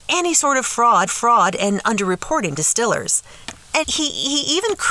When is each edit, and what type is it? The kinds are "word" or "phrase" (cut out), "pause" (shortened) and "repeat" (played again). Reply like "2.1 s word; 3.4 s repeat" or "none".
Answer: 1.1 s repeat; 2.6 s word; 3.8 s word